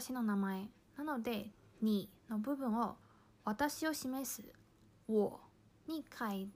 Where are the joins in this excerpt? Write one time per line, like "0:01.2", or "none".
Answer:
0:03.0
0:05.5